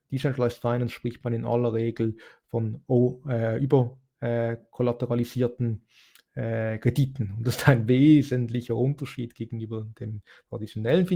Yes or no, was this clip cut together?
no